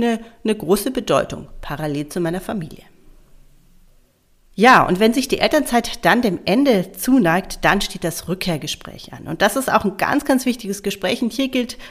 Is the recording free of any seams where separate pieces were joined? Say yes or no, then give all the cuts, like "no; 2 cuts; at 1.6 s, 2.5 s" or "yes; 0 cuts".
yes; 0 cuts